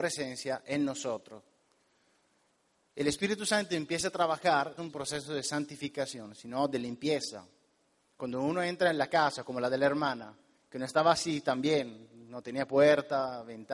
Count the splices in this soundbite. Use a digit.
1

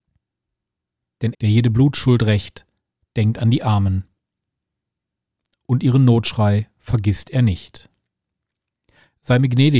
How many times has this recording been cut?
1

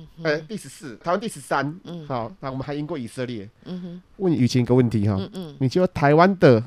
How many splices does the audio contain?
1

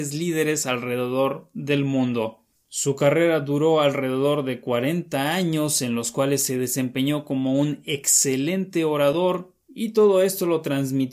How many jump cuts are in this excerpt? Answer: 0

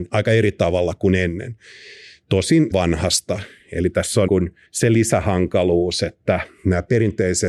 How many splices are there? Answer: 3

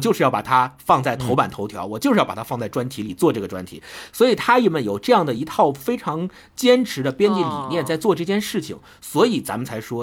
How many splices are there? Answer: 0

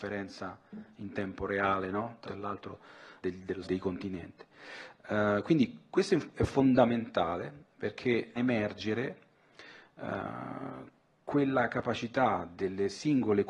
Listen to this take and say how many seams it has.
4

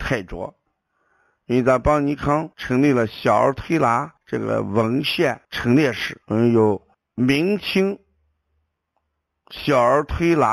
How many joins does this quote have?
5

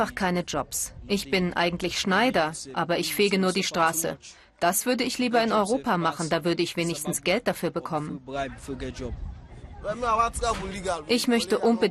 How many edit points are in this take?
0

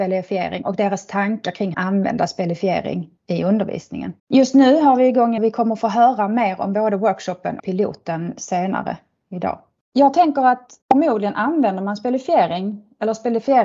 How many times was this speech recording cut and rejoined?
7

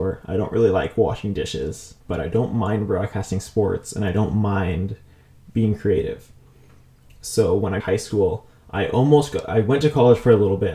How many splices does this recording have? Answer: 2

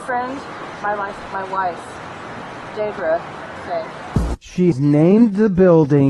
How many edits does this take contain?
3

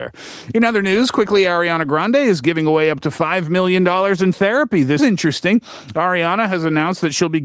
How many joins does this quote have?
2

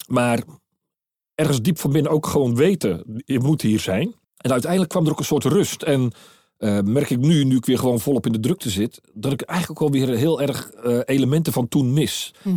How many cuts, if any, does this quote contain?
1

